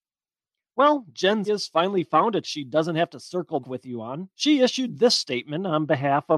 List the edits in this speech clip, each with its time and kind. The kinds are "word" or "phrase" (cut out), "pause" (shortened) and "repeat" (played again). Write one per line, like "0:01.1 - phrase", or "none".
0:01.4 - word
0:02.4 - word
0:03.6 - word
0:04.3 - pause